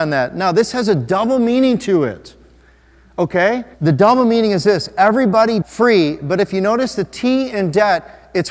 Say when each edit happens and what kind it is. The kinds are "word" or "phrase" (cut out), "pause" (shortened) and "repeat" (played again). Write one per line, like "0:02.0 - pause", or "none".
0:03.7 - pause
0:05.6 - word